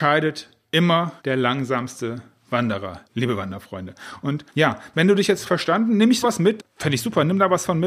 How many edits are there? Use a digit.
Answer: 6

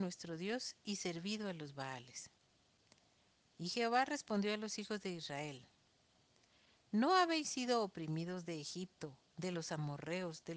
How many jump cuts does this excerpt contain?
0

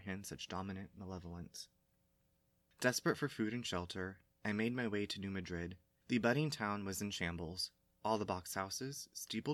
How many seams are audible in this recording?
0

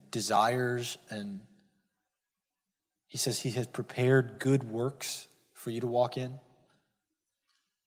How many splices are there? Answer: 0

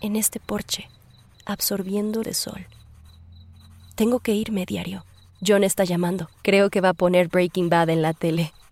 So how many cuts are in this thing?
2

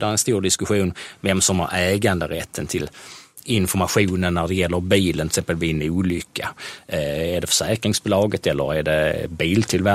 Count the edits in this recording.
0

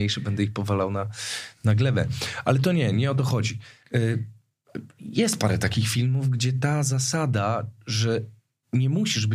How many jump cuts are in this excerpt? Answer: 0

